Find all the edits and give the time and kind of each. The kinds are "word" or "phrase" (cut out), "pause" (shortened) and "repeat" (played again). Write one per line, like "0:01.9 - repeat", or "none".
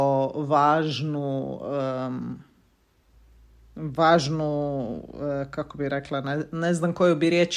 none